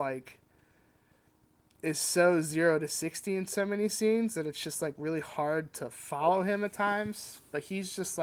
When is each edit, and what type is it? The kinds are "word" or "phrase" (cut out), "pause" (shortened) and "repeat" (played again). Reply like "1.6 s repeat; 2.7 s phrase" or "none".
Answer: none